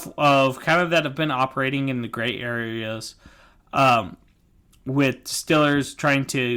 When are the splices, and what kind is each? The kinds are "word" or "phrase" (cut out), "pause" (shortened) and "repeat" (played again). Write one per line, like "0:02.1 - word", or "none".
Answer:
none